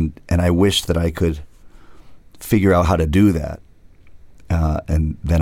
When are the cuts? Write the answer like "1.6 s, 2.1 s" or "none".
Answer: none